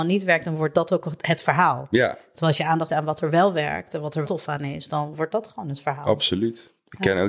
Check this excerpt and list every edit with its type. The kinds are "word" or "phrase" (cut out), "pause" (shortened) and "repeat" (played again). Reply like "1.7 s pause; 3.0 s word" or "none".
2.9 s word; 4.2 s word